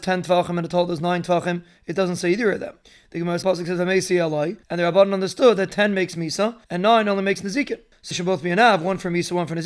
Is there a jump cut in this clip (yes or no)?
yes